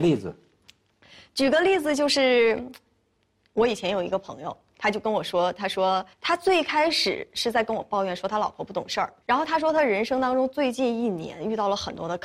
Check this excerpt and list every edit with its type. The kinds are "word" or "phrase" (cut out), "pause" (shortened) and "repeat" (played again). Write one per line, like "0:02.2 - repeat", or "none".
0:06.1 - pause
0:09.2 - pause